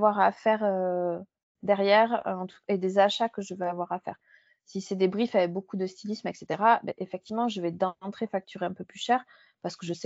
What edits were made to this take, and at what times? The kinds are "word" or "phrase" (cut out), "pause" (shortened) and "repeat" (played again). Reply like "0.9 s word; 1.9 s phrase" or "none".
none